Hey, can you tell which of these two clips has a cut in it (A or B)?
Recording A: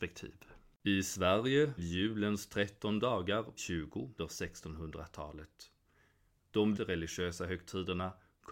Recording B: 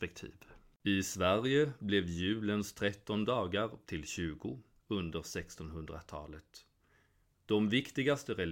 A